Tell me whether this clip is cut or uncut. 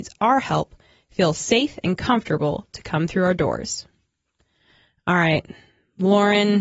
uncut